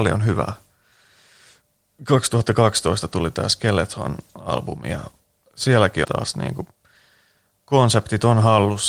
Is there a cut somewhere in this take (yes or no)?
yes